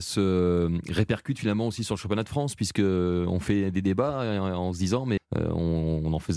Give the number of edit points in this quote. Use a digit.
1